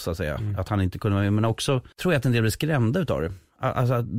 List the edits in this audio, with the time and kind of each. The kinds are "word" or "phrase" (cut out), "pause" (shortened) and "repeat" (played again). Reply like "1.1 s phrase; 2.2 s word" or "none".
1.9 s pause